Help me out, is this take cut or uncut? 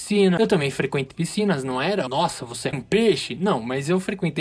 cut